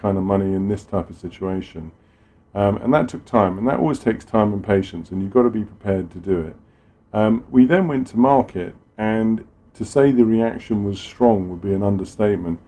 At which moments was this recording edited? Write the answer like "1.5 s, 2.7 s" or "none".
none